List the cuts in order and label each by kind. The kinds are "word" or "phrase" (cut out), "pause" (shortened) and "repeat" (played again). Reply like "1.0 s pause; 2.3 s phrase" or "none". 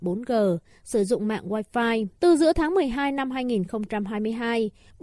2.2 s pause